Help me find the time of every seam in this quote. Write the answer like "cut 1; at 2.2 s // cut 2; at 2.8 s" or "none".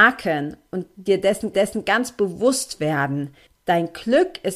cut 1; at 1.5 s // cut 2; at 3.5 s